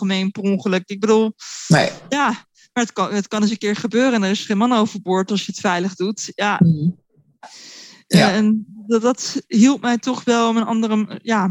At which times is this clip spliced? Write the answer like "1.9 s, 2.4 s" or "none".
none